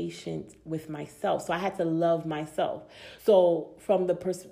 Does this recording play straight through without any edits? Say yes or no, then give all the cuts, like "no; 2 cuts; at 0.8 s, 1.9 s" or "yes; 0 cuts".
no; 1 cut; at 3.2 s